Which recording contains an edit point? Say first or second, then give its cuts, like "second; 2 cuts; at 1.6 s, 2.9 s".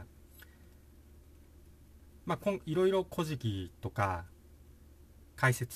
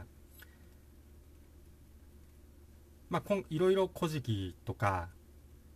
first; 1 cut; at 2.2 s